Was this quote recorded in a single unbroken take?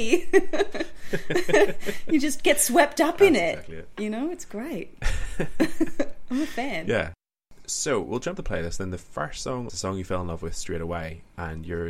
no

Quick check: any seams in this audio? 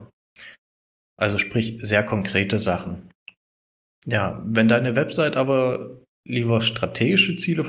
no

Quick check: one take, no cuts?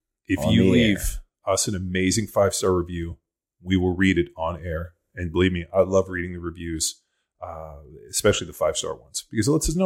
yes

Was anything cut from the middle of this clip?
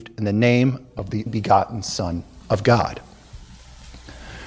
yes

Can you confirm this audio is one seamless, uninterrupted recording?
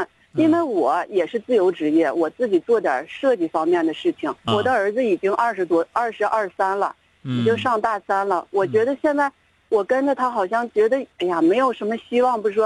no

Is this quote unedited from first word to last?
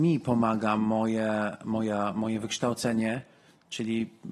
yes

